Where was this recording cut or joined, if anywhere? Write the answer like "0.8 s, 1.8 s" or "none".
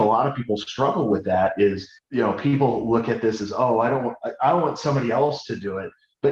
2.0 s